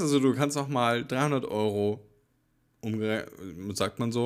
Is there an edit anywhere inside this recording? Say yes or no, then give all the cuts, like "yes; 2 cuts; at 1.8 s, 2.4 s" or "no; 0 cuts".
no; 0 cuts